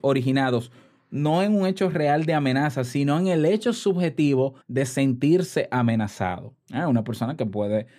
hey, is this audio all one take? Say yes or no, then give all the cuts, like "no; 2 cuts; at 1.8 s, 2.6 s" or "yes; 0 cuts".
no; 2 cuts; at 4.6 s, 6.6 s